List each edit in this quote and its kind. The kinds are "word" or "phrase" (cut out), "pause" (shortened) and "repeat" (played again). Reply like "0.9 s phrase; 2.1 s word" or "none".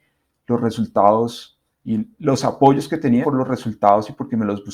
2.1 s pause; 3.2 s word